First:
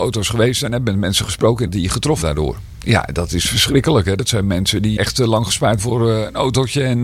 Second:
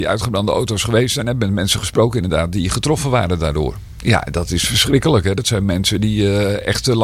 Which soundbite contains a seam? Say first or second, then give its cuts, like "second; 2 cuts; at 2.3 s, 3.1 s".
first; 4 cuts; at 1.7 s, 2.2 s, 5.0 s, 5.8 s